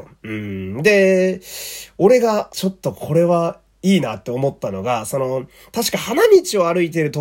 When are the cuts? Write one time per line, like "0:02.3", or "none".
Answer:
0:02.5